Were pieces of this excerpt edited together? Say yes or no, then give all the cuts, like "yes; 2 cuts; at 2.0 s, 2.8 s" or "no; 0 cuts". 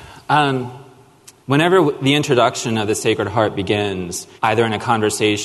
yes; 2 cuts; at 1.4 s, 4.4 s